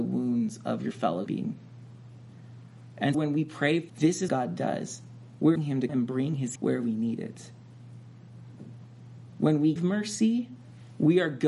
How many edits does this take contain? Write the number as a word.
eight